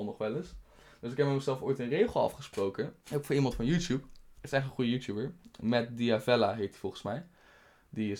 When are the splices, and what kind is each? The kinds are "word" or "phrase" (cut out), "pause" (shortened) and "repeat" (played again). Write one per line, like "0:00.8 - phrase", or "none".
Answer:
0:03.0 - pause